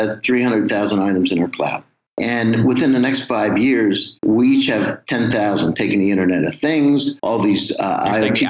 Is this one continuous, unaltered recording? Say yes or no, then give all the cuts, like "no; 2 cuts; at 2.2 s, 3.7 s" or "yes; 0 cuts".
no; 3 cuts; at 2.1 s, 4.2 s, 7.2 s